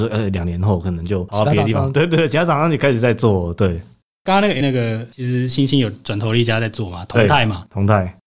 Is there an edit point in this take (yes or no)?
yes